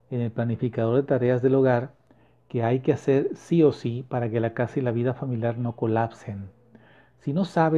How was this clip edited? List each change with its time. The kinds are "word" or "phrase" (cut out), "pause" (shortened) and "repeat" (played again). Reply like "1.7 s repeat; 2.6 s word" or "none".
none